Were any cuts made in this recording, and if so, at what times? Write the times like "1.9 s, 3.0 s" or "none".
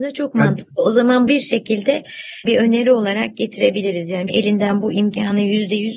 1.3 s, 2.4 s, 4.3 s

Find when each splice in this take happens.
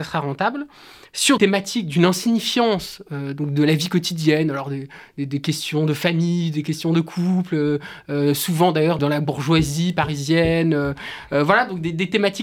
1.4 s, 9.0 s

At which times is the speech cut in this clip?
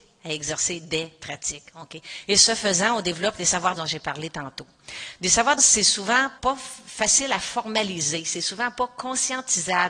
3.8 s, 5.6 s, 6.4 s

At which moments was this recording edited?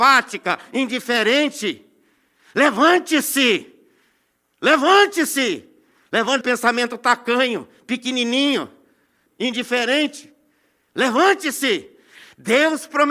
6.4 s, 9.3 s

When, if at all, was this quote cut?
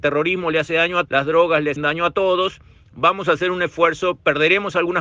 1.1 s, 1.8 s

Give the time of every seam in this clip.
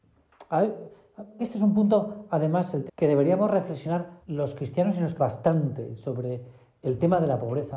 1.4 s, 2.9 s, 4.2 s, 5.2 s

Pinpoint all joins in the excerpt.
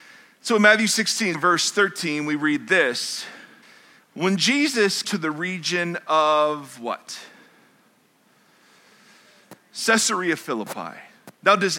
1.3 s, 3.6 s, 5.0 s

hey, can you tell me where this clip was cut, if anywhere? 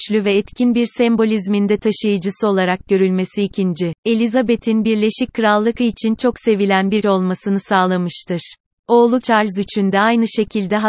4.0 s, 5.8 s, 7.0 s, 9.2 s

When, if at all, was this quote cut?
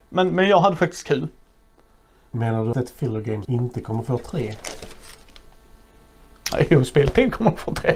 2.7 s, 3.4 s

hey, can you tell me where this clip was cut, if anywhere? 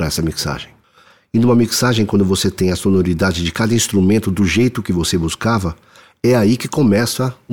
none

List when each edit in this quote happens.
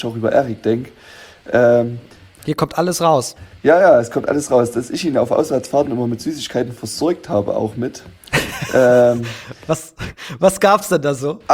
none

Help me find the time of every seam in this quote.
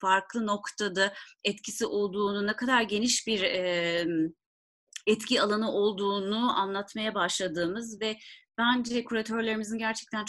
none

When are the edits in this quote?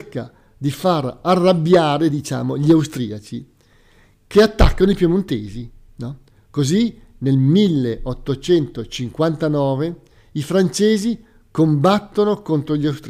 none

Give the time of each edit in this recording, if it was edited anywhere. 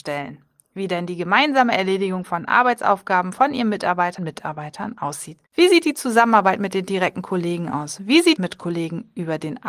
4.2 s, 5.5 s, 8.4 s

